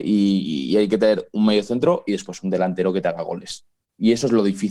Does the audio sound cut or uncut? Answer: uncut